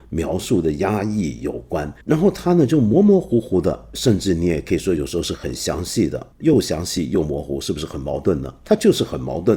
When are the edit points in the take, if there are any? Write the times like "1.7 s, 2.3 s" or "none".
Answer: 2.0 s, 6.3 s